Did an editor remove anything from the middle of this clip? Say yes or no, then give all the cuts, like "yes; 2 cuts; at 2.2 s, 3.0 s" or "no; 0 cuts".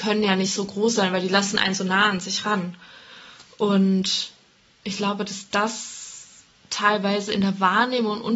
no; 0 cuts